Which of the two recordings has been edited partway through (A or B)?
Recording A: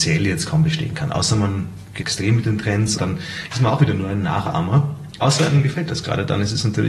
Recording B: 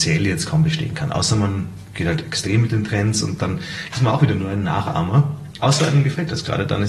A